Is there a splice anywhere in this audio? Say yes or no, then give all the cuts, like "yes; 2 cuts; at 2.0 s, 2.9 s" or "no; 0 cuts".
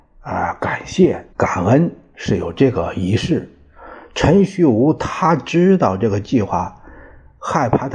yes; 1 cut; at 1.3 s